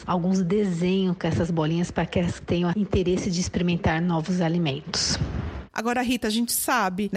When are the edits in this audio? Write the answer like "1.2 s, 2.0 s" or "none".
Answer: 2.4 s, 2.7 s